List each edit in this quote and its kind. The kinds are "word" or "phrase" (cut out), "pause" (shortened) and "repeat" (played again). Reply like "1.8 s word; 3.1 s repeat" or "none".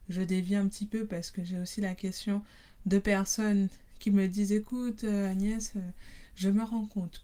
none